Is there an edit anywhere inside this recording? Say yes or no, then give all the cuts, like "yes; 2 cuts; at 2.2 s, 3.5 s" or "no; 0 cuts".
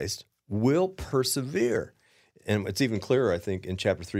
no; 0 cuts